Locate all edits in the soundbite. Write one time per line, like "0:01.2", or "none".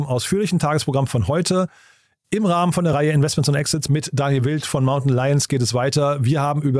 none